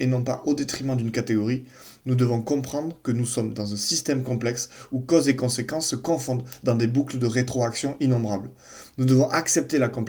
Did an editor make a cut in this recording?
no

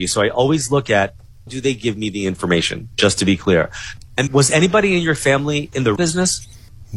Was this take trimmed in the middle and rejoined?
yes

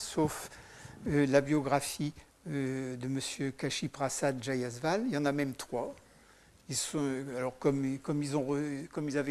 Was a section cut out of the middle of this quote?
no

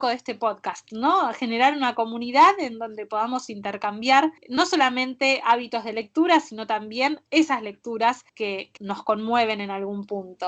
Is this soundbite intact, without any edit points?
no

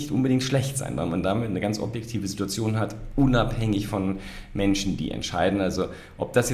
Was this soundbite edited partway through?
no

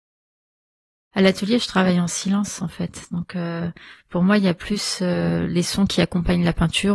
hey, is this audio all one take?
yes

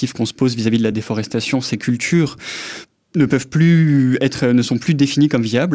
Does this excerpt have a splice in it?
no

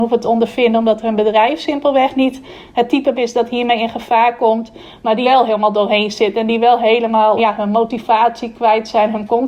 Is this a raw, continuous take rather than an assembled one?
no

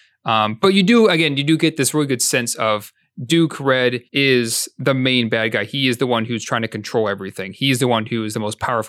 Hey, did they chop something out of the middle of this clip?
yes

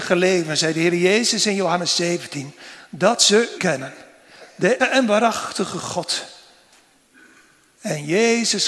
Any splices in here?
yes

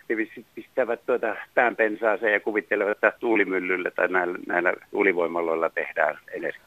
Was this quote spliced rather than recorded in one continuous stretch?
no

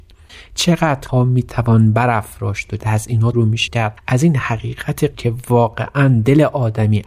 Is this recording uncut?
no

